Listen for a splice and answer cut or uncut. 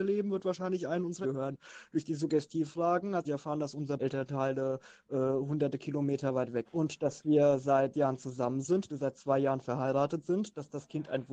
cut